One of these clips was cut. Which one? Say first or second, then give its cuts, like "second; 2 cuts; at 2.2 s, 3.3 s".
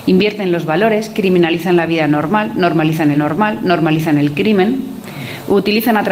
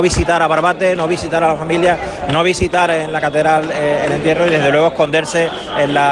first; 1 cut; at 3.1 s